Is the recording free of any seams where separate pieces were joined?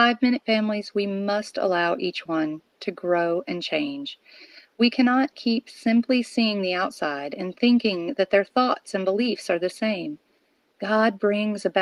yes; 0 cuts

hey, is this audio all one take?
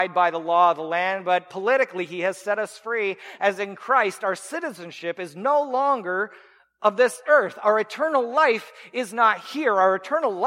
yes; 0 cuts

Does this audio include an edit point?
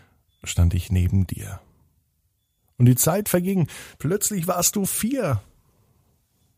yes; 1 cut; at 3.9 s

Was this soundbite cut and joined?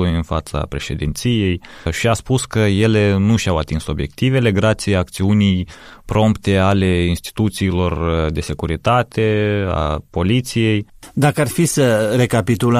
no; 0 cuts

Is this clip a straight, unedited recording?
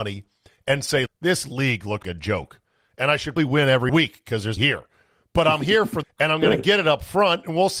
no; 6 cuts; at 1.1 s, 2.0 s, 3.4 s, 3.9 s, 4.6 s, 6.0 s

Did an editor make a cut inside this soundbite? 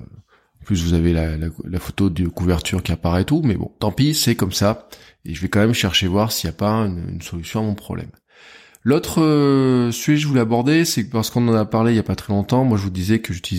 no; 0 cuts

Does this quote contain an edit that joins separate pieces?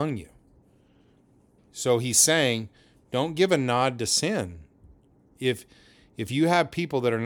no; 0 cuts

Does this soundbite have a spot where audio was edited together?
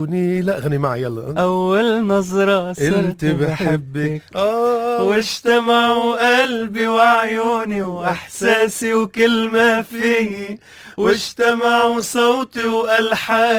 no; 0 cuts

